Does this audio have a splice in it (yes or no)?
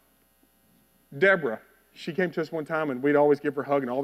no